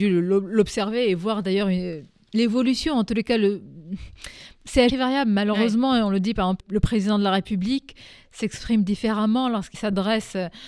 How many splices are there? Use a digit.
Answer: 3